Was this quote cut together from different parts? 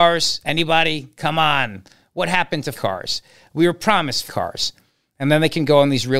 yes; 2 cuts; at 2.7 s, 4.3 s

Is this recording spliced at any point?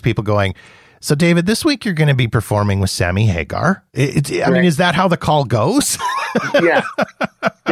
no; 0 cuts

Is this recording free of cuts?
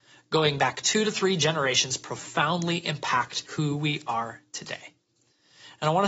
no; 1 cut; at 3.5 s

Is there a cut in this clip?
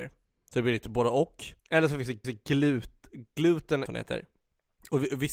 yes; 3 cuts; at 1.6 s, 2.2 s, 3.9 s

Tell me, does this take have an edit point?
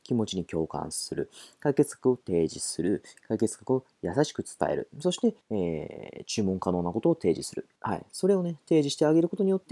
yes; 2 cuts; at 5.4 s, 7.8 s

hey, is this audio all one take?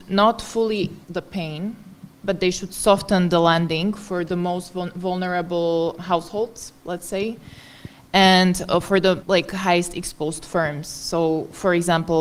no; 3 cuts; at 1.0 s, 6.0 s, 9.2 s

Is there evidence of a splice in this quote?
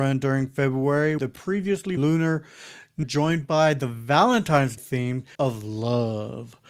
yes; 5 cuts; at 1.2 s, 2.0 s, 3.0 s, 4.8 s, 5.3 s

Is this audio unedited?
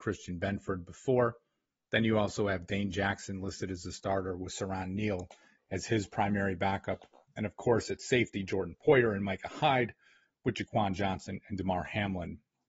yes; 0 cuts

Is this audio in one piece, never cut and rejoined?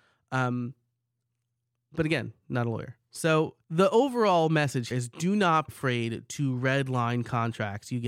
no; 3 cuts; at 3.6 s, 4.9 s, 5.7 s

